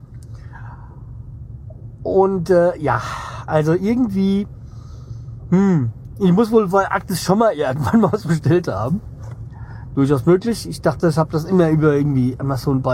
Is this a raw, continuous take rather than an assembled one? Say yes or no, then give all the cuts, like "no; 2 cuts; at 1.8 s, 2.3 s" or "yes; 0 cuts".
yes; 0 cuts